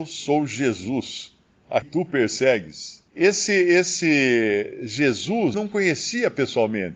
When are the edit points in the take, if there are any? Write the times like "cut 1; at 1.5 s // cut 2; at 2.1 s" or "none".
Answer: cut 1; at 1.8 s // cut 2; at 3.1 s // cut 3; at 5.5 s

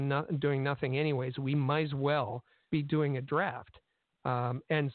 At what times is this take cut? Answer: none

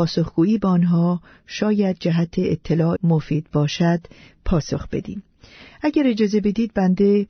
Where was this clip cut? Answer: cut 1; at 3.0 s

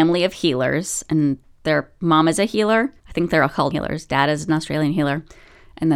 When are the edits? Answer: cut 1; at 3.0 s // cut 2; at 3.7 s

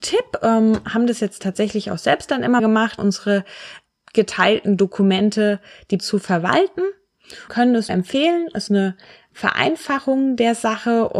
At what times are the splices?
cut 1; at 2.6 s // cut 2; at 3.0 s // cut 3; at 6.0 s // cut 4; at 7.5 s // cut 5; at 7.9 s // cut 6; at 8.7 s

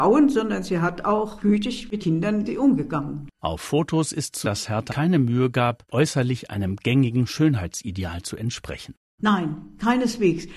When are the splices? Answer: cut 1; at 1.4 s // cut 2; at 2.0 s // cut 3; at 2.5 s // cut 4; at 4.4 s // cut 5; at 4.9 s // cut 6; at 5.9 s

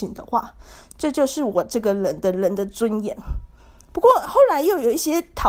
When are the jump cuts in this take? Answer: cut 1; at 3.6 s

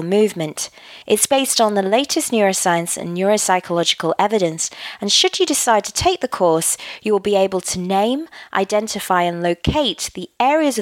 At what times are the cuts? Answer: cut 1; at 1.0 s

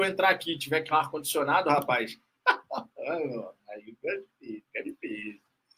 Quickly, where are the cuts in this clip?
cut 1; at 0.9 s

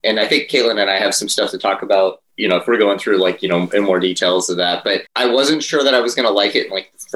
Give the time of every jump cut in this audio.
cut 1; at 5.1 s

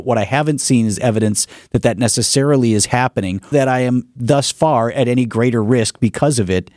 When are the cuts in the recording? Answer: cut 1; at 3.5 s

